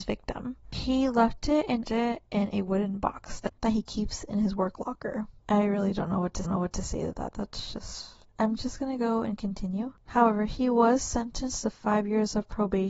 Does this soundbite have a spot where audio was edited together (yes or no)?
yes